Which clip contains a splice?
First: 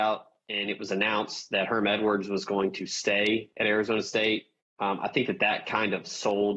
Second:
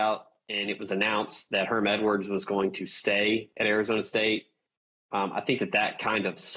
first; 1 cut; at 4.6 s

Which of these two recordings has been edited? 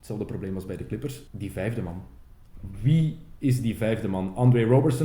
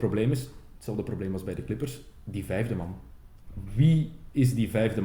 first; 1 cut; at 1.3 s

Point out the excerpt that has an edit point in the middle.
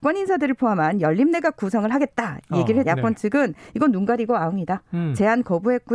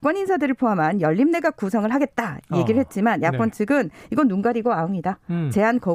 first; 1 cut; at 2.8 s

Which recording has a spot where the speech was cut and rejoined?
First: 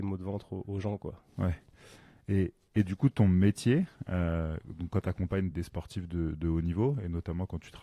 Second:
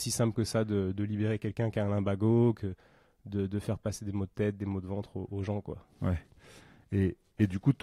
first; 1 cut; at 5.5 s

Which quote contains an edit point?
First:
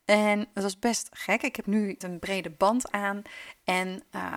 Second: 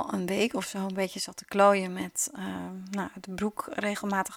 first; 2 cuts; at 1.6 s, 2.0 s

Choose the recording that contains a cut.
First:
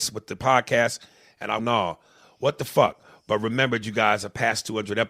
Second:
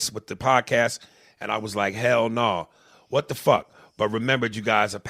first; 1 cut; at 1.6 s

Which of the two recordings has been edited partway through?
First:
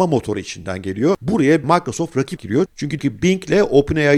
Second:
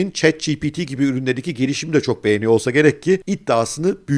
first; 3 cuts; at 1.6 s, 2.4 s, 3.0 s

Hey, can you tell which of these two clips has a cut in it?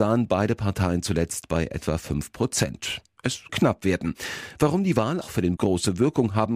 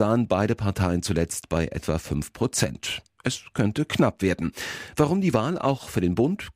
first; 3 cuts; at 3.5 s, 5.2 s, 5.6 s

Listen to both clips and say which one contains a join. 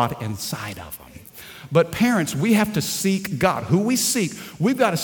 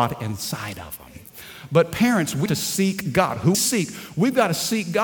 second; 2 cuts; at 2.5 s, 3.5 s

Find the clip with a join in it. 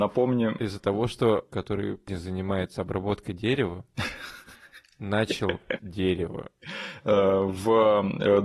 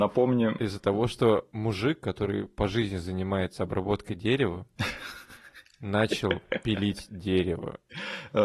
first; 3 cuts; at 1.5 s, 2.1 s, 5.8 s

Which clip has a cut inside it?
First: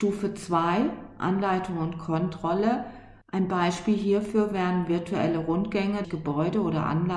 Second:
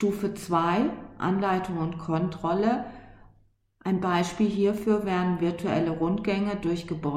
first; 2 cuts; at 3.2 s, 6.0 s

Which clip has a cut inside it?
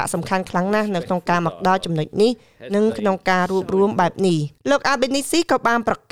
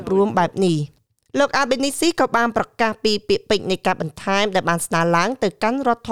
first; 1 cut; at 4.6 s

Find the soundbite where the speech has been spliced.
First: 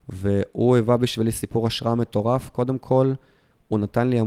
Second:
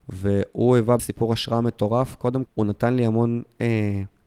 second; 2 cuts; at 1.0 s, 2.5 s

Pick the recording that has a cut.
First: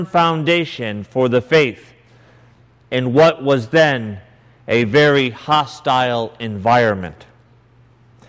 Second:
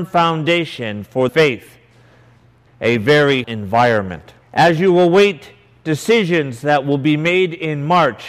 second; 4 cuts; at 1.3 s, 2.7 s, 3.4 s, 4.4 s

